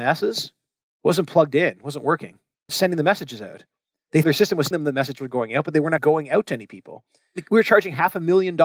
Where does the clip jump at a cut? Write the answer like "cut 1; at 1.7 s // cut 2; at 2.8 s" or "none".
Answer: cut 1; at 2.7 s // cut 2; at 4.2 s // cut 3; at 4.7 s // cut 4; at 6.0 s